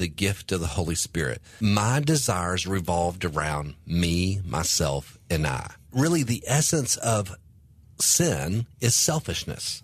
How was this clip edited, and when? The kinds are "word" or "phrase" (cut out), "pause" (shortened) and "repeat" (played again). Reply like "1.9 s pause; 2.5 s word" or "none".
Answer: none